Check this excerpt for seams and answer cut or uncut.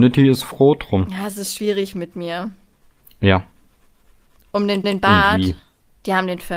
cut